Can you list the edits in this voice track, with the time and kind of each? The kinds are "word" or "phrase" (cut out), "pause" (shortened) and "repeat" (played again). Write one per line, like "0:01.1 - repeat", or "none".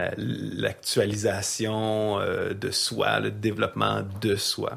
none